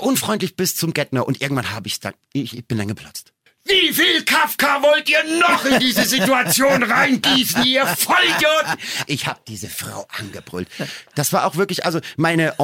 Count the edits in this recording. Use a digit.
1